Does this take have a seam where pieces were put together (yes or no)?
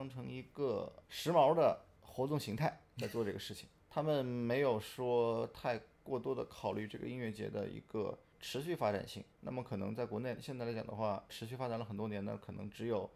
yes